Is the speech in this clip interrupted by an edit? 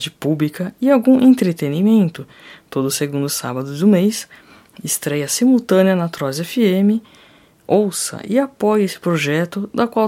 no; 0 cuts

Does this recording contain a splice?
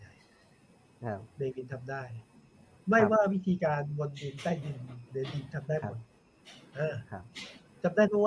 no; 0 cuts

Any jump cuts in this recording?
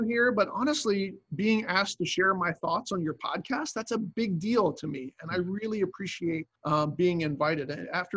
yes; 1 cut; at 6.6 s

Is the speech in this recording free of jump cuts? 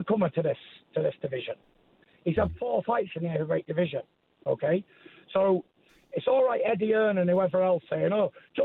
yes; 0 cuts

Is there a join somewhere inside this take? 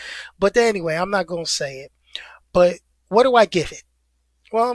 no; 0 cuts

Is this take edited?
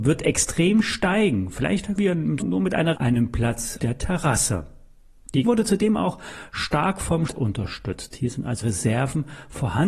yes; 7 cuts; at 2.0 s, 2.4 s, 2.9 s, 3.8 s, 5.4 s, 7.3 s, 8.6 s

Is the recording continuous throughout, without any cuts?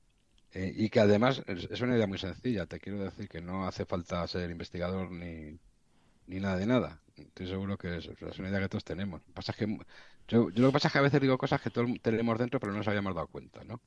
yes; 0 cuts

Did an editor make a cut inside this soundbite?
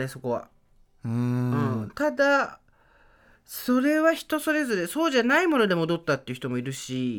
no; 0 cuts

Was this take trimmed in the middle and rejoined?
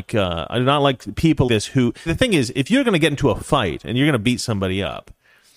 yes; 2 cuts; at 1.5 s, 2.1 s

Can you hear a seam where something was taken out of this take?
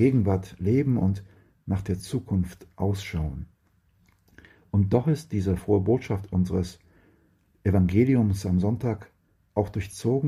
no; 0 cuts

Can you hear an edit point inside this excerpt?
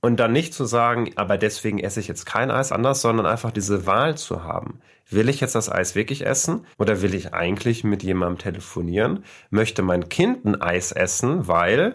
yes; 2 cuts; at 2.7 s, 6.7 s

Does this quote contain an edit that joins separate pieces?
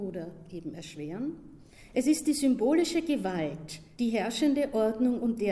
no; 0 cuts

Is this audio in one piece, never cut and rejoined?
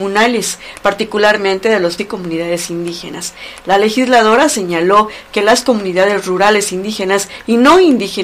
no; 1 cut; at 2.0 s

